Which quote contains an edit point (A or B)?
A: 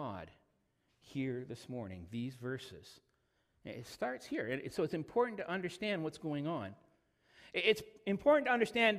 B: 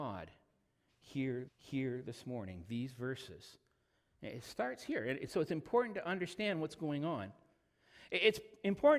B